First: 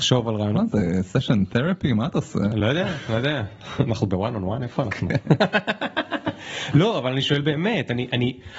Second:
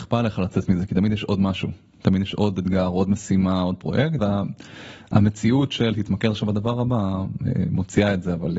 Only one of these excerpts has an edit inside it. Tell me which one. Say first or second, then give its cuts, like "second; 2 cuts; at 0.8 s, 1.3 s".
second; 1 cut; at 4.2 s